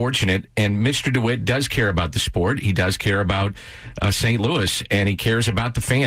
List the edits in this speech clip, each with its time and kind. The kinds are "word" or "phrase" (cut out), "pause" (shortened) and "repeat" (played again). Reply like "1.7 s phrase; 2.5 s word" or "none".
none